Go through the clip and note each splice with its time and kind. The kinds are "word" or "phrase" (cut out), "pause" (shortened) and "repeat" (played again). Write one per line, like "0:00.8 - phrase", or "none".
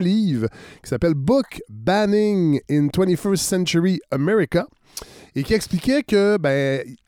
none